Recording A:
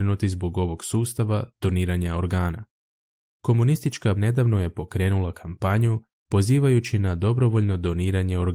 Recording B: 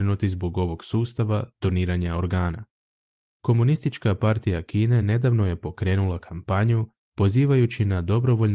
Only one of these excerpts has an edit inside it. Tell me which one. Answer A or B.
A